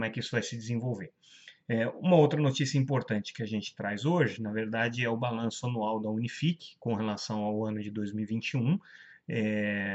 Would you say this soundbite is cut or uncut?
uncut